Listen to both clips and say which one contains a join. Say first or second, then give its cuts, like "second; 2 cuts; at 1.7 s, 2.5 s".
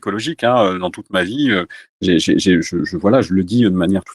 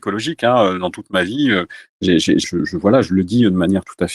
second; 1 cut; at 2.4 s